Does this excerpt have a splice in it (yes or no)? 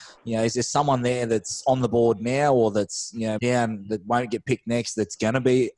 yes